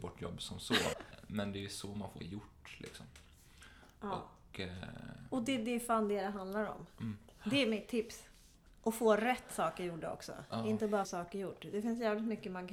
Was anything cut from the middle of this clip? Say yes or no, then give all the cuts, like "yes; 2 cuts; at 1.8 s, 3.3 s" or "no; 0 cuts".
yes; 3 cuts; at 0.9 s, 2.2 s, 11.0 s